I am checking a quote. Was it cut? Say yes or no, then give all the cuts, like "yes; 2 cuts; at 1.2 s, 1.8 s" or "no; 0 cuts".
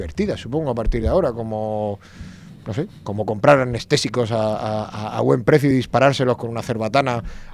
no; 0 cuts